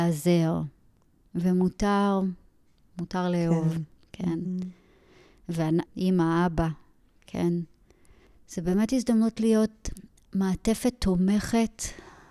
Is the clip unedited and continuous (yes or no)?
no